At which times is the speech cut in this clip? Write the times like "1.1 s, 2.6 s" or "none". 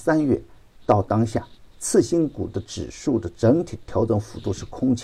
1.7 s